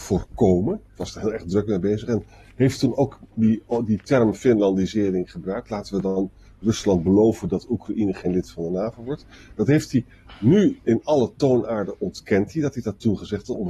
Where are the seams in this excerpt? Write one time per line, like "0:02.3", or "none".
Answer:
none